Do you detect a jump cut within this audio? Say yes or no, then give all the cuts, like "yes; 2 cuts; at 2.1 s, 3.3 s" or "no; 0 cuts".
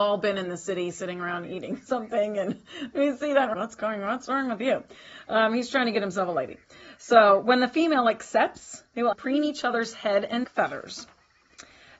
yes; 3 cuts; at 3.5 s, 9.1 s, 10.4 s